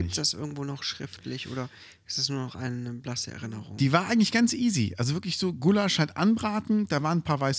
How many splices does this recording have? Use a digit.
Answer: 0